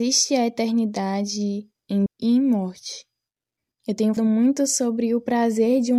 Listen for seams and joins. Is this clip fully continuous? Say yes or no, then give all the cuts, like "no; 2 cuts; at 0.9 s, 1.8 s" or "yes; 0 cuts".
no; 2 cuts; at 2.1 s, 4.2 s